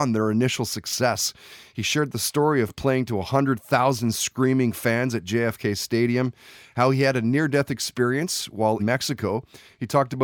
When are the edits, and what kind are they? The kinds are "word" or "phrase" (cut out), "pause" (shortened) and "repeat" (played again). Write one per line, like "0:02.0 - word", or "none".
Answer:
0:08.8 - word